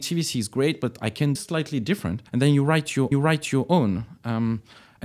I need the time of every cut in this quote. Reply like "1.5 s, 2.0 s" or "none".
1.4 s, 2.3 s, 3.1 s